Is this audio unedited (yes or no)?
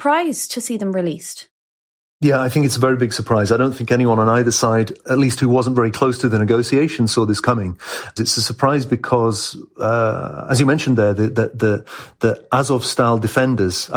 yes